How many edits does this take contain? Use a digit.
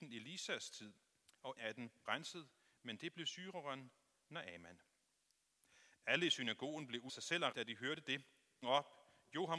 5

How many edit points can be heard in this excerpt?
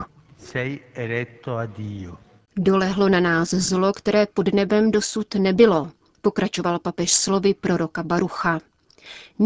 0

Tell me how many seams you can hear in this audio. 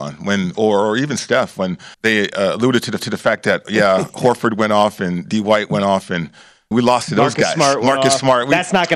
3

